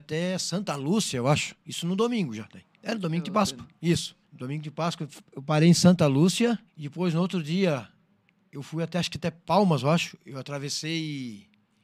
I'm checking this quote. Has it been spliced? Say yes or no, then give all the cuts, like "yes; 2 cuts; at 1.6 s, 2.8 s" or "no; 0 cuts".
yes; 4 cuts; at 1.6 s, 2.8 s, 4.2 s, 6.7 s